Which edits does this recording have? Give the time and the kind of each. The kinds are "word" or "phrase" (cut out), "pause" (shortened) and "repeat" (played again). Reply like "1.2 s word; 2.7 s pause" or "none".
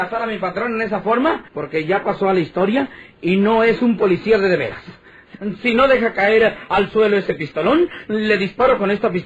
1.5 s pause